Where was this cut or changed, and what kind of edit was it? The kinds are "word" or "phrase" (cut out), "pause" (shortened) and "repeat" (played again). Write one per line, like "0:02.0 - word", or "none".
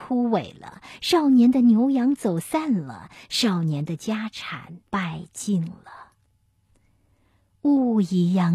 0:04.9 - pause